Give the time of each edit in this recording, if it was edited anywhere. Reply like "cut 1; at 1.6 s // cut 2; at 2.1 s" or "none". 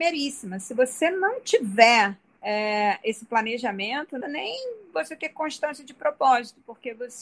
cut 1; at 2.4 s // cut 2; at 4.2 s